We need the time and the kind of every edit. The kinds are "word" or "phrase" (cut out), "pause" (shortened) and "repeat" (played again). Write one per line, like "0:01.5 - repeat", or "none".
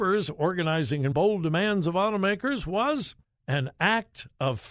0:01.1 - word
0:03.2 - pause